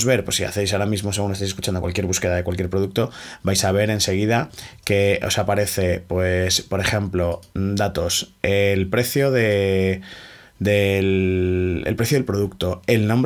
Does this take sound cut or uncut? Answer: uncut